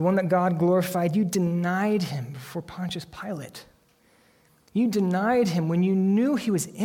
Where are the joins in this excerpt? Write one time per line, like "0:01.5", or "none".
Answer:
none